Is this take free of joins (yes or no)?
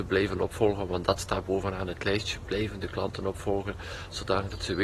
yes